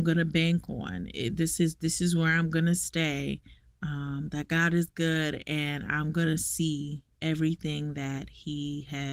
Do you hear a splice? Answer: no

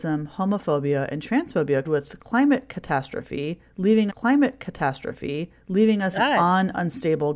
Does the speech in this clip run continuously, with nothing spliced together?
no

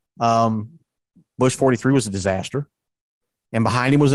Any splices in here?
no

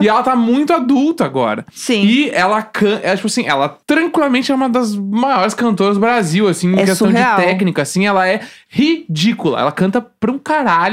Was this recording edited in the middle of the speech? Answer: yes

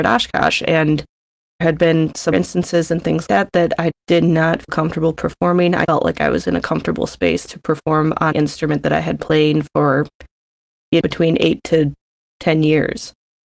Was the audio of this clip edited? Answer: yes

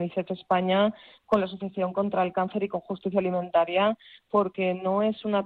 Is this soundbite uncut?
yes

